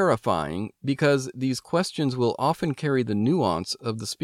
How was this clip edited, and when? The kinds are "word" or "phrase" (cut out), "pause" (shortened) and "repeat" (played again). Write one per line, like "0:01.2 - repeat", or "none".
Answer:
none

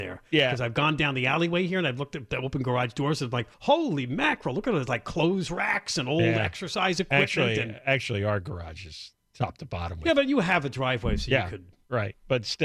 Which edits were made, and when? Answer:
0:03.5 - pause

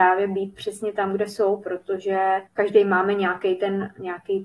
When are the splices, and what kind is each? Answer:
0:02.5 - pause

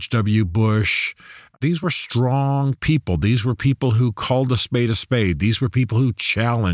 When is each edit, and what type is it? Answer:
none

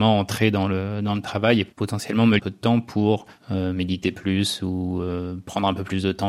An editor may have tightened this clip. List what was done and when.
0:01.7 - pause
0:02.4 - phrase

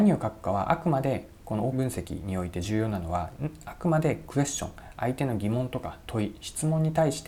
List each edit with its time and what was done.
0:01.7 - word

